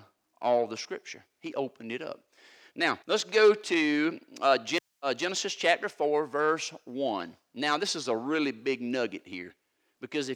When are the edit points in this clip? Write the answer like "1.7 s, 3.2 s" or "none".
3.0 s